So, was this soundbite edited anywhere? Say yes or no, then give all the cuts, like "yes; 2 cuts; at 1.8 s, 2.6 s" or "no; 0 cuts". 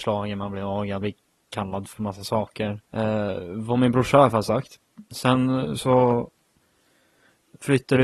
yes; 2 cuts; at 1.0 s, 2.8 s